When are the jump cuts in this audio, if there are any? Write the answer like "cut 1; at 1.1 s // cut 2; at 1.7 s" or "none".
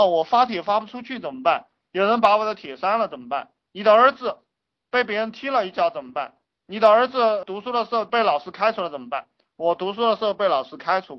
cut 1; at 6.4 s